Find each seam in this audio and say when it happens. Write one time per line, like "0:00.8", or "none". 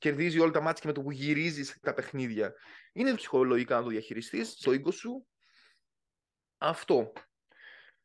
0:01.8
0:03.2
0:04.6